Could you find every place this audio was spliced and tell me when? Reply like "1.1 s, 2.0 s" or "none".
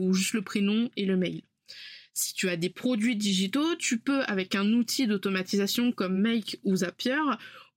none